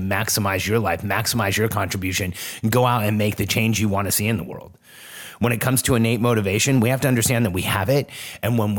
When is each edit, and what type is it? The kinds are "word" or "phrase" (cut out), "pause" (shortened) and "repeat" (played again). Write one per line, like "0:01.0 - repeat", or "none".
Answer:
none